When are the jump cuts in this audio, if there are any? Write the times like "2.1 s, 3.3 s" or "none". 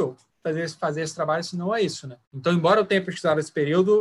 2.2 s